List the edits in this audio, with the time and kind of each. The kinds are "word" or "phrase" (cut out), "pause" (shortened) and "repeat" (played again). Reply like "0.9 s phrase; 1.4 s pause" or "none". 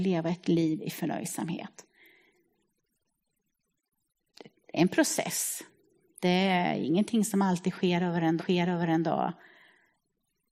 8.4 s repeat

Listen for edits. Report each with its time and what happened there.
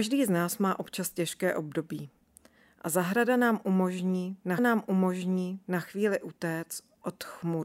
4.6 s repeat

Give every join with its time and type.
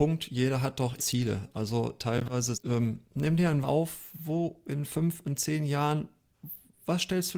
1.0 s phrase; 2.5 s phrase; 3.1 s pause; 3.6 s phrase

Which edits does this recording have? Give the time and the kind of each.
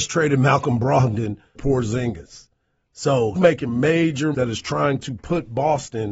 1.5 s word; 3.3 s word; 4.3 s word

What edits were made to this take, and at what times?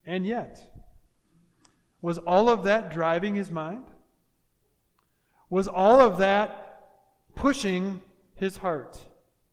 none

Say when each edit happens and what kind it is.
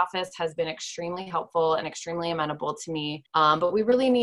3.3 s pause

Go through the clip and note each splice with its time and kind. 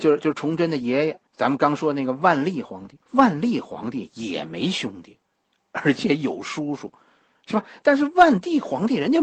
1.3 s pause; 3.0 s pause

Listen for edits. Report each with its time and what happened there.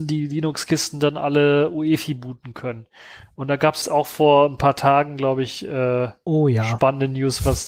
3.8 s word

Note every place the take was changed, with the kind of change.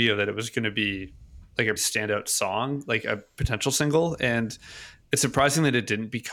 1.8 s word

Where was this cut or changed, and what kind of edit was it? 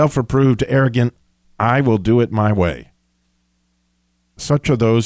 none

